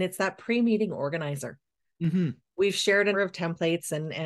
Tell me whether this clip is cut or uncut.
cut